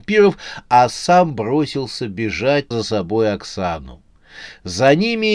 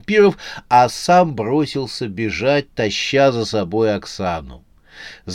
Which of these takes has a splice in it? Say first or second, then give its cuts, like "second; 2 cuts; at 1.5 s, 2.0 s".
first; 1 cut; at 2.7 s